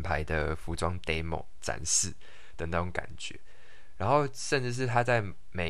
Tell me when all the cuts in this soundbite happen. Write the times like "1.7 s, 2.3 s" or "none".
none